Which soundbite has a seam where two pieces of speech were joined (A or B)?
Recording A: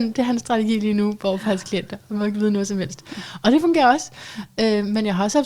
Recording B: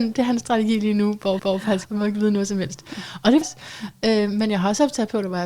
B